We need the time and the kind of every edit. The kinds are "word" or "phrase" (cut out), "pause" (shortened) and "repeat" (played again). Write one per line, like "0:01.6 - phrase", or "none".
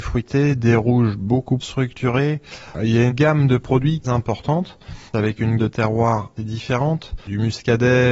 0:01.6 - word
0:03.1 - word
0:04.0 - phrase
0:05.1 - pause
0:05.6 - word
0:06.4 - word